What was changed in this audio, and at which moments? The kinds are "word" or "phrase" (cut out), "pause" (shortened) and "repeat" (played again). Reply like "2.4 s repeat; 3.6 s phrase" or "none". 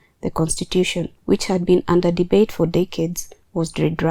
1.2 s pause